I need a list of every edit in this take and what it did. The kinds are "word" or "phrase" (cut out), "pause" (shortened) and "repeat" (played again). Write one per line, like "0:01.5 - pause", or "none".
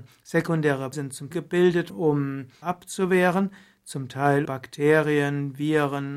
0:00.9 - word
0:01.3 - word
0:01.9 - word
0:02.6 - word
0:04.4 - word